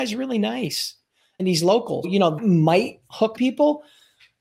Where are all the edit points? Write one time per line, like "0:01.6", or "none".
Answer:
0:01.4
0:02.0
0:02.4
0:03.4